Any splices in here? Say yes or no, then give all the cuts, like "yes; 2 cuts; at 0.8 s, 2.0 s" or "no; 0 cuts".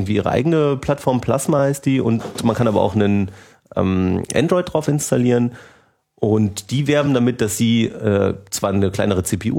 no; 0 cuts